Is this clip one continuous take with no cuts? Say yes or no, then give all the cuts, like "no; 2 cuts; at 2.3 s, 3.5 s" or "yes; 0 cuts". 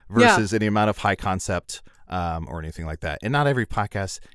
yes; 0 cuts